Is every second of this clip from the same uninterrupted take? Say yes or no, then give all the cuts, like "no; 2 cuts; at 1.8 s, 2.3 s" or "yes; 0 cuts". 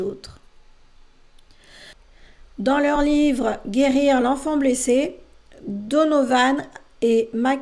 yes; 0 cuts